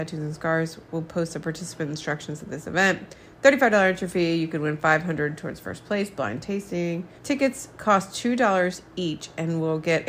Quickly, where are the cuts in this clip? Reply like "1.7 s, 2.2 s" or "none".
7.2 s